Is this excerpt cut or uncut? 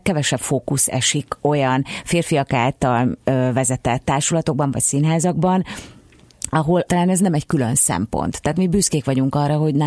cut